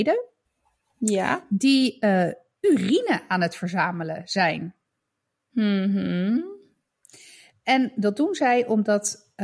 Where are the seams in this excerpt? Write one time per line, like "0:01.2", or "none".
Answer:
none